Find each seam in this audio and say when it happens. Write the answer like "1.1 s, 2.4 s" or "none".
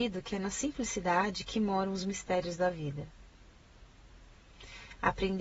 none